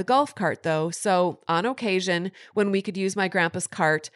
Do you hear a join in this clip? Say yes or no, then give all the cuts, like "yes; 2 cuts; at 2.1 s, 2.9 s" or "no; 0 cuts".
no; 0 cuts